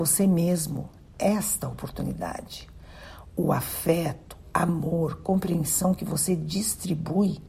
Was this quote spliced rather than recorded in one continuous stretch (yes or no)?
no